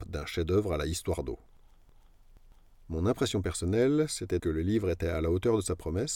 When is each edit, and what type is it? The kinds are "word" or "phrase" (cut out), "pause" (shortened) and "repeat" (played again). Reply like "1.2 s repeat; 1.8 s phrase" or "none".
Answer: 4.4 s word

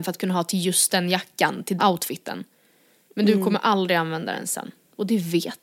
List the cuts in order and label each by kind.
1.8 s word

